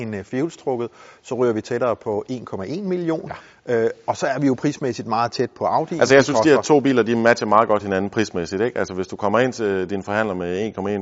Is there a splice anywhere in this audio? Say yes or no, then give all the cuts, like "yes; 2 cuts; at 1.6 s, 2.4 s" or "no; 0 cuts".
no; 0 cuts